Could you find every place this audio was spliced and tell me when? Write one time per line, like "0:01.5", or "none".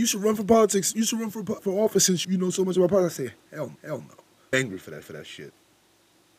0:01.6
0:02.2
0:03.8
0:04.5
0:05.0